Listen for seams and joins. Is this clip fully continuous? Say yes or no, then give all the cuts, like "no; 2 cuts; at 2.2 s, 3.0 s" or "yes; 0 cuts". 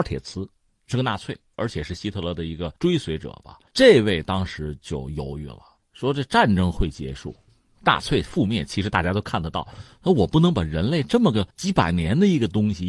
no; 3 cuts; at 2.8 s, 3.7 s, 11.5 s